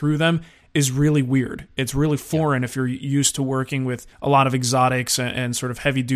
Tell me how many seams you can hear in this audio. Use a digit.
1